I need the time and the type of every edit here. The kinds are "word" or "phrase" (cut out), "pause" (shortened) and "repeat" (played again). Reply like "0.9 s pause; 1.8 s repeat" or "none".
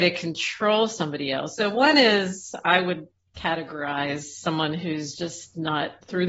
none